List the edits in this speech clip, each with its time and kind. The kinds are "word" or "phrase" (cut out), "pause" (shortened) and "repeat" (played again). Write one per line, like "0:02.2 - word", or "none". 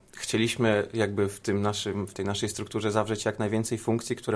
none